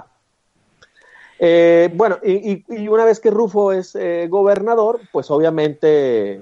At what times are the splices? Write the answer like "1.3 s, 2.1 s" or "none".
none